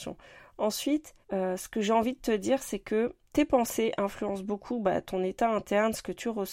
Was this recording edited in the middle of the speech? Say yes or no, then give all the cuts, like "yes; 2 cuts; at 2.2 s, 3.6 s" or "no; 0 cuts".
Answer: yes; 2 cuts; at 1.2 s, 3.3 s